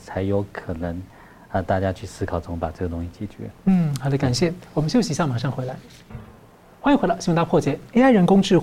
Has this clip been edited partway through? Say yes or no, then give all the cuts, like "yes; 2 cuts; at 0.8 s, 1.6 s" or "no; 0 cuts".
no; 0 cuts